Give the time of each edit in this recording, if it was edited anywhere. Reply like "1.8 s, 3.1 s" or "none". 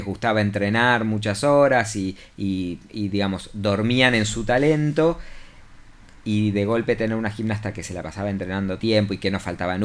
8.8 s